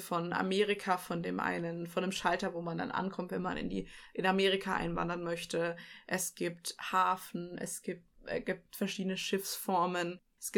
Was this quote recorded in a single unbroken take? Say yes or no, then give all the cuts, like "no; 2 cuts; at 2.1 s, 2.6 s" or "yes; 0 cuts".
yes; 0 cuts